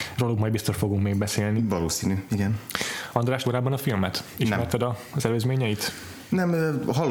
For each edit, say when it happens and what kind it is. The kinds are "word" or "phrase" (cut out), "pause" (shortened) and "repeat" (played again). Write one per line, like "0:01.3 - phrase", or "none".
0:03.4 - word